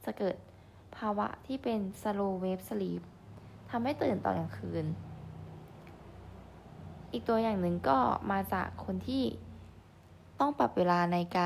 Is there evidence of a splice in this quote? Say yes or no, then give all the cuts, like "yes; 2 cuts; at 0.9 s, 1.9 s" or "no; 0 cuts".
no; 0 cuts